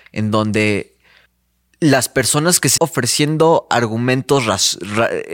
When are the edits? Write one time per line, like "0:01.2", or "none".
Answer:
0:01.3
0:02.8

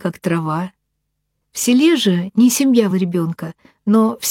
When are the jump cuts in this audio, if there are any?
0:02.9

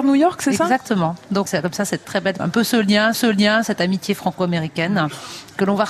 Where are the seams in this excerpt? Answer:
0:01.5
0:02.0
0:02.4
0:03.1

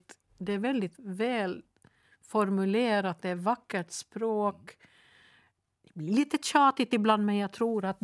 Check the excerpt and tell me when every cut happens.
none

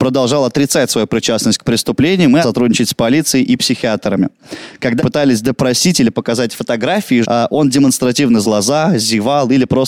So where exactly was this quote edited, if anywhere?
0:02.4
0:05.0
0:07.2
0:08.4

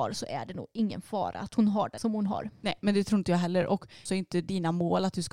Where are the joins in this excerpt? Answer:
0:02.0
0:04.1

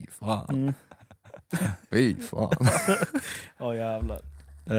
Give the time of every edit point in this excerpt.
none

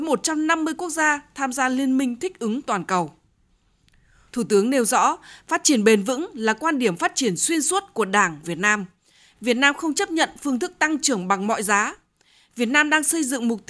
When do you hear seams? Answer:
0:08.4

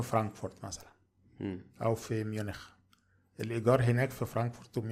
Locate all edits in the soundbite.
none

